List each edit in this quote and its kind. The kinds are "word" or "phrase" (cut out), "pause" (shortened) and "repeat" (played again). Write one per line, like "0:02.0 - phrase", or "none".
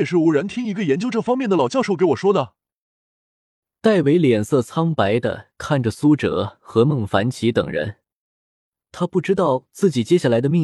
none